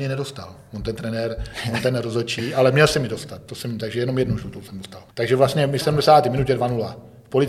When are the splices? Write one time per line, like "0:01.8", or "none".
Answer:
0:05.1
0:05.8